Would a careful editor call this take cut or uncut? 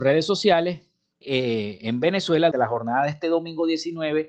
cut